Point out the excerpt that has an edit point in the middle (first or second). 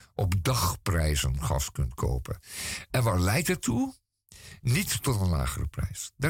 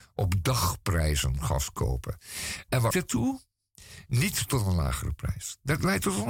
second